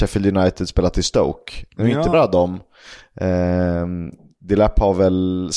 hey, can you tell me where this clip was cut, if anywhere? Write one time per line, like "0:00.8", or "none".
0:02.1